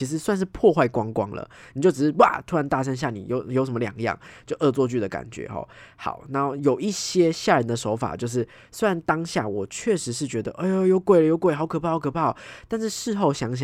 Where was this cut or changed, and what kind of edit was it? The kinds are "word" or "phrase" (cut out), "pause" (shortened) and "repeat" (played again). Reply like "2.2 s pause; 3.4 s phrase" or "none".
none